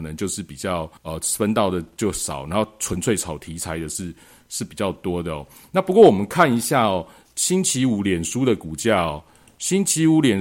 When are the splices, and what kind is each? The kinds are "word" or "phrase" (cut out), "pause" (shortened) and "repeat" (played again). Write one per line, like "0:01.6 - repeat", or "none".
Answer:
0:01.0 - pause